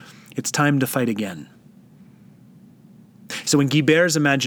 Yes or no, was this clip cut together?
no